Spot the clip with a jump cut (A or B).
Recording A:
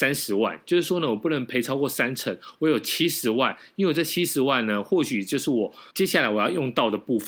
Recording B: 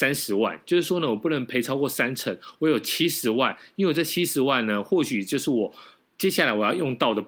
A